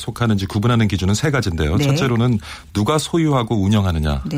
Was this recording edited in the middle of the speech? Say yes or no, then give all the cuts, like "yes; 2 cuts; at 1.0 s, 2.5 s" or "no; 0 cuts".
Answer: no; 0 cuts